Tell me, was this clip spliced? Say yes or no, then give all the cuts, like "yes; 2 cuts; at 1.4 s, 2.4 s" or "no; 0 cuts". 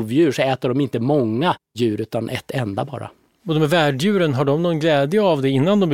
no; 0 cuts